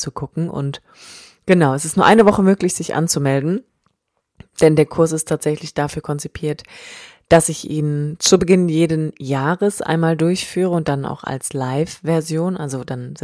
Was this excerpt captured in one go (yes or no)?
yes